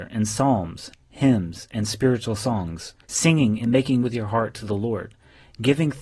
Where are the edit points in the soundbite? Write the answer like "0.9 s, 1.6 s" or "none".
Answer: 3.0 s, 4.0 s

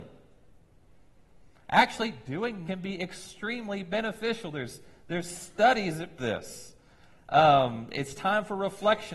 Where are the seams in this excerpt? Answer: 2.7 s, 6.2 s

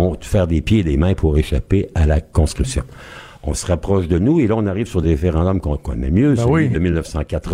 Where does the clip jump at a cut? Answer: none

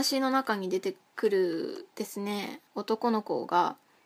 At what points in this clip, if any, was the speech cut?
2.7 s

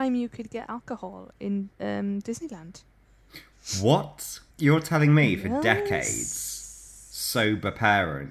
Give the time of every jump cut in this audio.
1.7 s, 4.5 s

